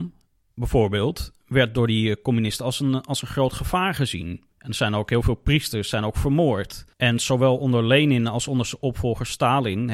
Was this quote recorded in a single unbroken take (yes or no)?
no